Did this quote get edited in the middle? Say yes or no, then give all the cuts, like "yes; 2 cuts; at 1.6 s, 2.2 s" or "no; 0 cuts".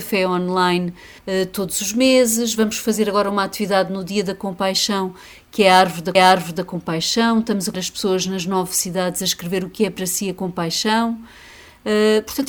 yes; 3 cuts; at 1.2 s, 6.1 s, 7.7 s